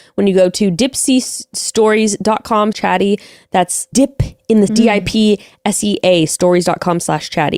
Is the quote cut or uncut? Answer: cut